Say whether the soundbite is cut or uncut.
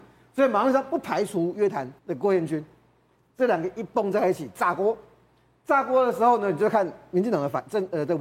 cut